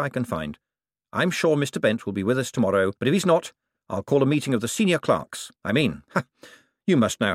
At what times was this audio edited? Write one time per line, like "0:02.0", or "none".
0:03.0
0:05.6